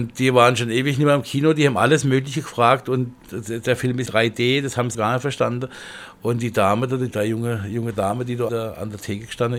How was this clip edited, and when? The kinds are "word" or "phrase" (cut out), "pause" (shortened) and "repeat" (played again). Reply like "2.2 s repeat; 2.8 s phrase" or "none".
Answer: 4.1 s word; 4.9 s word; 7.1 s word; 8.5 s word